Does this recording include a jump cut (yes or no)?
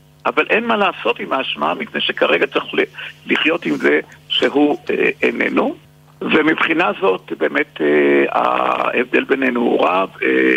no